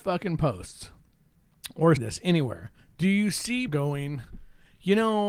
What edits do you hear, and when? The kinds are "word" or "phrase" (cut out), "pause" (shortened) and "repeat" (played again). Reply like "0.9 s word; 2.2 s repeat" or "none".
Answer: 2.0 s word; 2.8 s pause; 3.7 s word